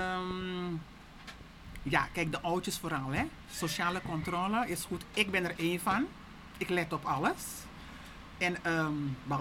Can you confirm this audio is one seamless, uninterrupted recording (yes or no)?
yes